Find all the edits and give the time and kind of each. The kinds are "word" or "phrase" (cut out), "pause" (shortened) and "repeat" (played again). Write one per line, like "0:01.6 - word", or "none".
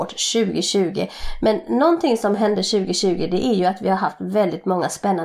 none